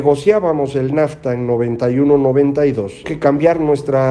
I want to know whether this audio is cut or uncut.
cut